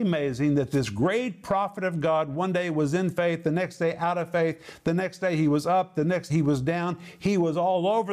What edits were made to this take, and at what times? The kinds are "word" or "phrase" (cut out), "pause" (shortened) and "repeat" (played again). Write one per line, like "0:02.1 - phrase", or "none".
0:06.3 - word